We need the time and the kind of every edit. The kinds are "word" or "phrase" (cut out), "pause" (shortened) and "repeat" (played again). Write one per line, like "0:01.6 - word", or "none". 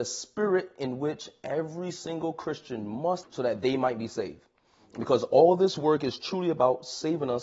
0:03.2 - word